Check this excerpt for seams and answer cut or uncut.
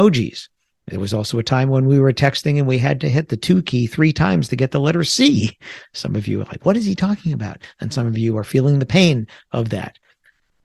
uncut